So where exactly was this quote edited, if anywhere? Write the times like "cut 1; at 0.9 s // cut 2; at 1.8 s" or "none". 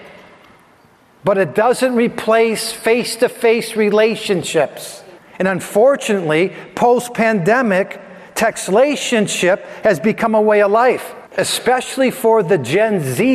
cut 1; at 5.2 s // cut 2; at 11.3 s